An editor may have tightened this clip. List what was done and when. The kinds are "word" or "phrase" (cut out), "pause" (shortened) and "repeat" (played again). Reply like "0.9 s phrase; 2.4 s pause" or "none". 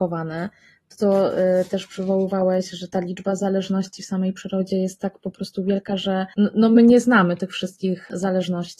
none